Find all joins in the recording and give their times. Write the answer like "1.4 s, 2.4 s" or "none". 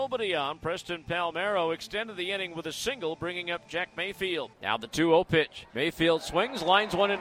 4.5 s, 5.7 s